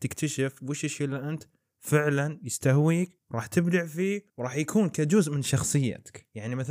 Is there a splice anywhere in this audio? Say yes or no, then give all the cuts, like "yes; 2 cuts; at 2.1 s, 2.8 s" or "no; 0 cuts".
no; 0 cuts